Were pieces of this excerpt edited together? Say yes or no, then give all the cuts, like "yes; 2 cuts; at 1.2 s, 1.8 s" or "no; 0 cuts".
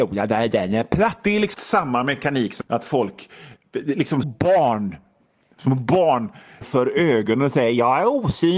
yes; 4 cuts; at 1.5 s, 2.6 s, 4.2 s, 6.6 s